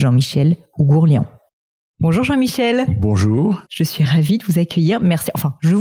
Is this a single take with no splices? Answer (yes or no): yes